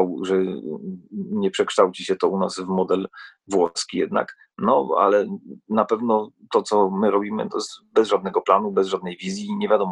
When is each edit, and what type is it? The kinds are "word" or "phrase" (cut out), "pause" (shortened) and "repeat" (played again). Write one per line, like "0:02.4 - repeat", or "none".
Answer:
none